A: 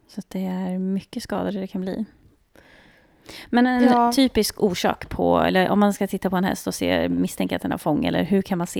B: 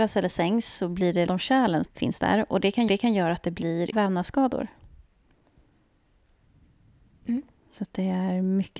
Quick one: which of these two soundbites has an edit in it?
B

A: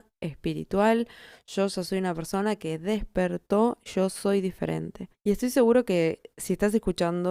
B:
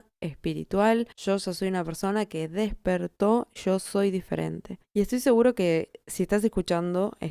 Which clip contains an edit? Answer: B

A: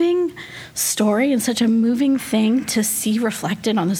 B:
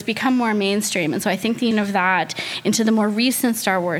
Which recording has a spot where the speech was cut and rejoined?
B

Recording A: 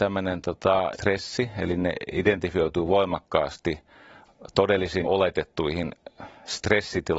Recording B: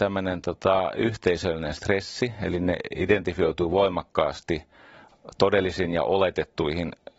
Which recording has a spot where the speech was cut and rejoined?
A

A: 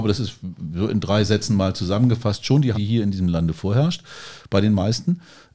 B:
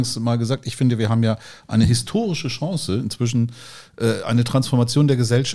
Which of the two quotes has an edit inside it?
A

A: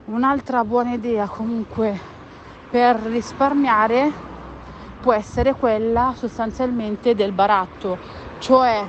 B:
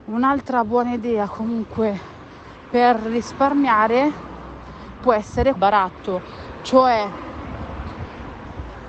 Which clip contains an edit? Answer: B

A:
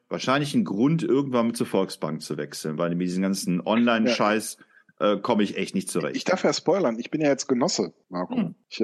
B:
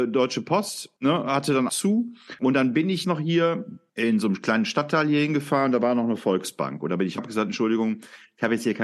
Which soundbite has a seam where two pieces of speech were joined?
B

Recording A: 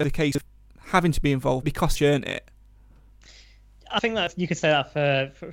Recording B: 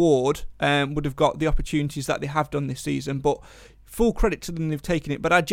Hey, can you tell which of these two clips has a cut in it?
A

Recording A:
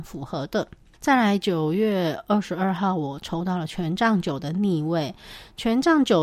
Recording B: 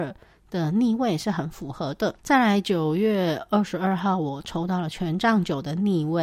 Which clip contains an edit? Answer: B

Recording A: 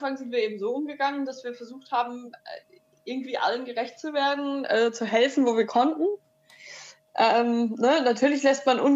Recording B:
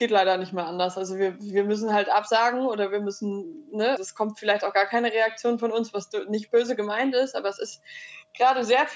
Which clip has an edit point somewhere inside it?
B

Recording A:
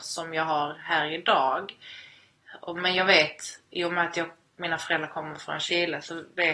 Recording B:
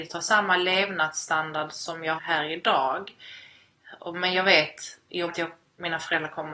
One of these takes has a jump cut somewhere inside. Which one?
B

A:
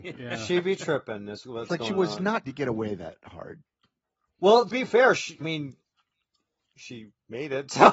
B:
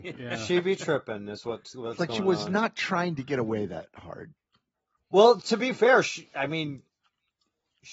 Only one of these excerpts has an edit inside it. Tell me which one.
A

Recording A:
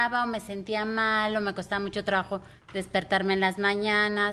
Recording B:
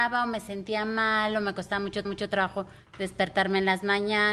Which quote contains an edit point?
B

